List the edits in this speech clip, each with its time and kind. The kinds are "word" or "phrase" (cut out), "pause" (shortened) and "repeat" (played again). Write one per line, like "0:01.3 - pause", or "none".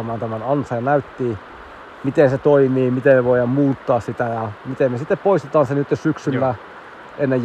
none